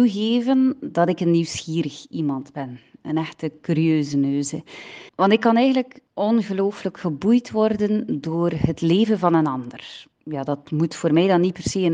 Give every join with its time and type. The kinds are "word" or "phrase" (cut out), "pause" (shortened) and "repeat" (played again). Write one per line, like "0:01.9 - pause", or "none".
0:05.1 - pause
0:06.1 - pause
0:10.1 - pause